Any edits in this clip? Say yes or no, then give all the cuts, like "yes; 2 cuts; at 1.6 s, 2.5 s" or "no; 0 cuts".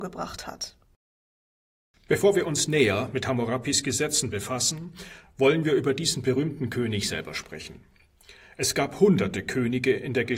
no; 0 cuts